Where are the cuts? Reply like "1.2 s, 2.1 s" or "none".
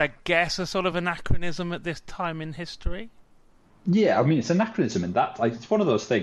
none